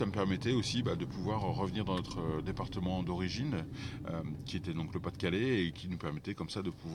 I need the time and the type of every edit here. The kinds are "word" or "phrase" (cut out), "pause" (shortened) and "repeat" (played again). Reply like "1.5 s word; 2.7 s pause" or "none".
none